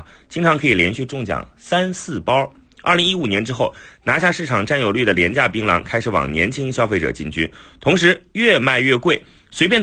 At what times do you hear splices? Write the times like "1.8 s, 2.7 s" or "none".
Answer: none